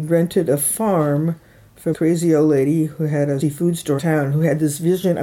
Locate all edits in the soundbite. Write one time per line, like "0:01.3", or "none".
0:01.9
0:03.4
0:04.0